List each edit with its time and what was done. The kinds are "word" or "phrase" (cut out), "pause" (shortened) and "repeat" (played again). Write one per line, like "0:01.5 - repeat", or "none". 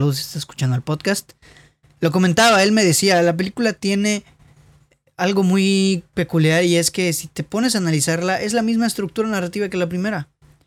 none